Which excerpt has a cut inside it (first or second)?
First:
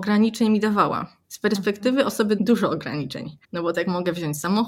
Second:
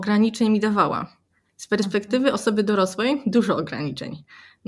first